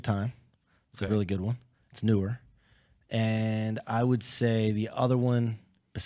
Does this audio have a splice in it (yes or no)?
no